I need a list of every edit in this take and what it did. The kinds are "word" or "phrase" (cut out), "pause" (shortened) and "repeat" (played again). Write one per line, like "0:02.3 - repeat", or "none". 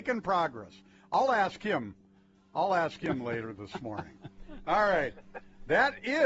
none